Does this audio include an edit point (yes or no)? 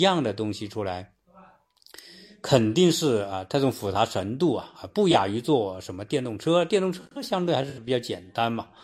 no